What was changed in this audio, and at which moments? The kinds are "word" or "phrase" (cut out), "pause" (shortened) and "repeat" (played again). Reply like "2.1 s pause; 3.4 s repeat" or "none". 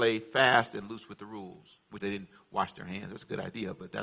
2.0 s word